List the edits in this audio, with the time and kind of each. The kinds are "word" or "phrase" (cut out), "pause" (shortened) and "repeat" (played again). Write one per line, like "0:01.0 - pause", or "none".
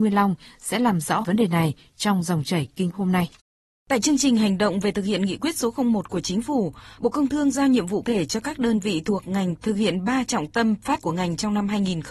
0:01.2 - word
0:02.9 - word
0:08.0 - word
0:11.0 - word